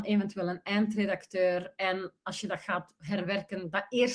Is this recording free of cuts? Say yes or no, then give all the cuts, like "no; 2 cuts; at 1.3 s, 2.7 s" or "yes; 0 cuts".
yes; 0 cuts